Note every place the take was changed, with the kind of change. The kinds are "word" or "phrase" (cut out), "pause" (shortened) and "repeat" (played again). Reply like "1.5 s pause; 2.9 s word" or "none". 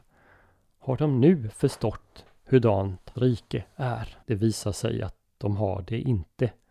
3.1 s word; 4.2 s pause